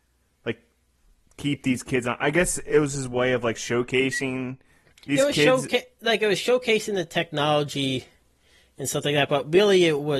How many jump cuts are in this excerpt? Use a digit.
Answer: 0